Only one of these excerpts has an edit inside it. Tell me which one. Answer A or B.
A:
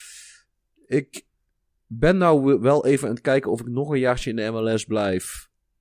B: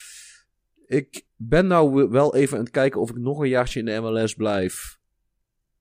B